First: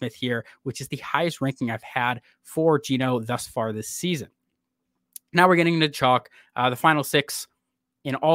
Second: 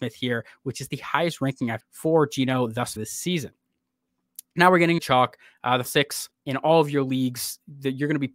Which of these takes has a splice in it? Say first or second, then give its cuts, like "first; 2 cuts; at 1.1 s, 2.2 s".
second; 5 cuts; at 1.8 s, 3.0 s, 5.0 s, 5.8 s, 6.3 s